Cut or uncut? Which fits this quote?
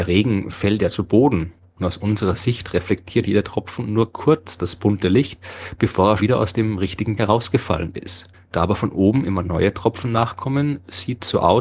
cut